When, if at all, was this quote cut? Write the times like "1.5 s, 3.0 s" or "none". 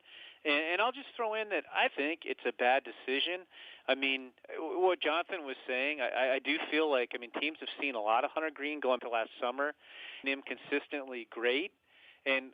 1.9 s, 9.0 s, 10.2 s